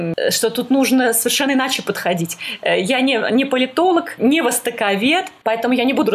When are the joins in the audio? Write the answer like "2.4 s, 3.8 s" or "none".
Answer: none